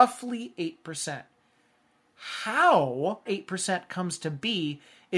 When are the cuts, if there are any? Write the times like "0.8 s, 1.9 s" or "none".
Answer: 3.3 s